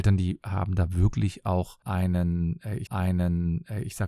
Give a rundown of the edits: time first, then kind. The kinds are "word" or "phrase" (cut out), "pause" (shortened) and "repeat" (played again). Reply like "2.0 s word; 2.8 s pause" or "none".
2.9 s repeat